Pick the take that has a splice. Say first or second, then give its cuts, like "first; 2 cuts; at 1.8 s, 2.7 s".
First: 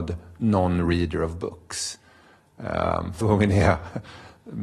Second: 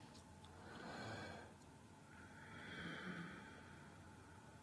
first; 1 cut; at 3.2 s